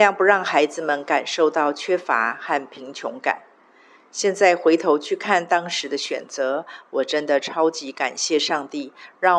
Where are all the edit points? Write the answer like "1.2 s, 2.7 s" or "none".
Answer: none